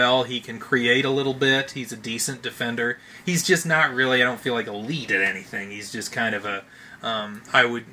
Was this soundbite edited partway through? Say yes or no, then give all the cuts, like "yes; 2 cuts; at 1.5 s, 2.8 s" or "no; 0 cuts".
no; 0 cuts